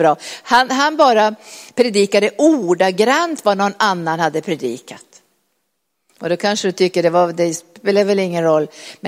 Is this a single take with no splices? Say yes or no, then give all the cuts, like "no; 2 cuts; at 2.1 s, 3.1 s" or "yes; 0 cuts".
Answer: yes; 0 cuts